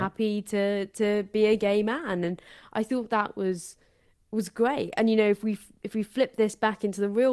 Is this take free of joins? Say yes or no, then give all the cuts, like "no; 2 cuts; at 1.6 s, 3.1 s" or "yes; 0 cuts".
yes; 0 cuts